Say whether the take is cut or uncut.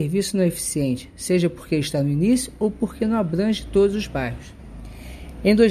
uncut